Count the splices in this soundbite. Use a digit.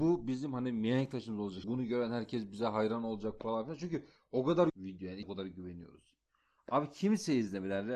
3